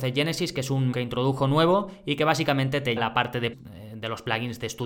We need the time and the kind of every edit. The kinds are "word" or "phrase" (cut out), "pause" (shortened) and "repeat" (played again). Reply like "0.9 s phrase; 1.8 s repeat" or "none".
0.9 s word; 3.0 s word; 3.5 s word

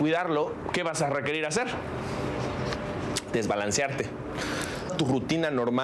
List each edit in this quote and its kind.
4.9 s word

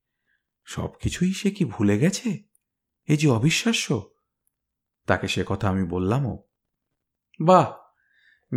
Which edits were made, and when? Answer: none

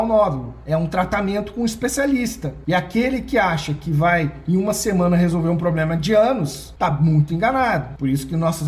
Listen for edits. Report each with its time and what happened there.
none

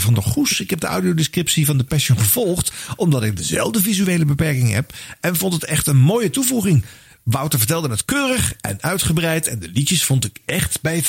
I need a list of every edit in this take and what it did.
none

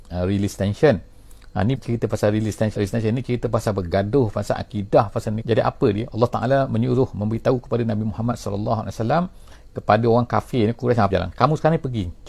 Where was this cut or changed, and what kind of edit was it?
1.7 s word; 2.8 s word; 5.4 s word; 11.1 s word

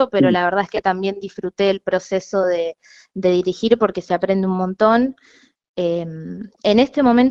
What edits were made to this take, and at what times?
none

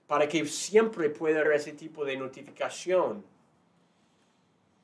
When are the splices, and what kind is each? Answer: 1.4 s word

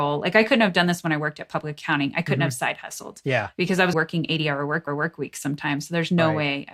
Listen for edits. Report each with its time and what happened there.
3.9 s word; 4.9 s repeat

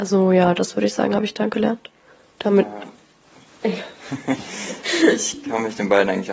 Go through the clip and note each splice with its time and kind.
none

